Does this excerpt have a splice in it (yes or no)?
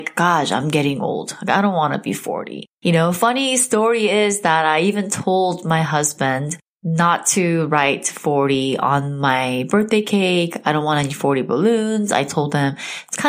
yes